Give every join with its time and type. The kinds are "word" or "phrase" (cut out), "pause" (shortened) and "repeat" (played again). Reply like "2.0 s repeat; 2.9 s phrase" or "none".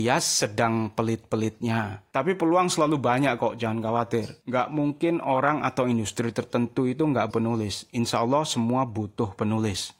7.3 s word

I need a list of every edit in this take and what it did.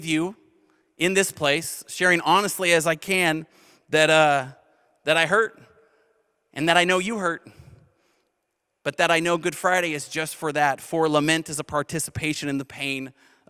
none

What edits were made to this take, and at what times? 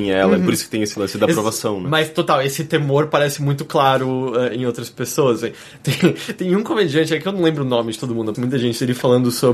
8.3 s word

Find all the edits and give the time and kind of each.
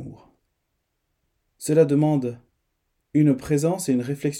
none

